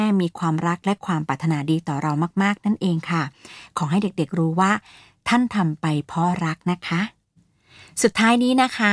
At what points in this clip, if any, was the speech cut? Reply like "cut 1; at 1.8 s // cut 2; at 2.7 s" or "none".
none